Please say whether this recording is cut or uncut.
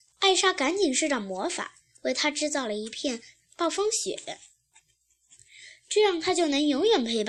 uncut